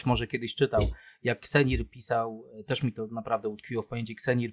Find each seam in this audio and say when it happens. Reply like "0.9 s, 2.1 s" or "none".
none